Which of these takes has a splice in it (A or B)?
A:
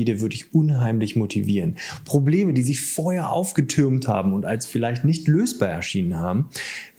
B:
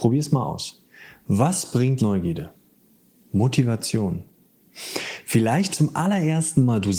B